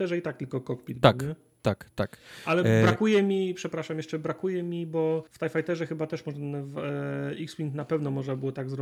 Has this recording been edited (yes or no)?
yes